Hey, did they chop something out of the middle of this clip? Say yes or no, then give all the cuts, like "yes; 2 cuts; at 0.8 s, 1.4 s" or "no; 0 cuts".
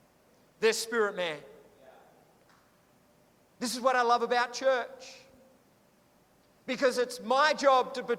no; 0 cuts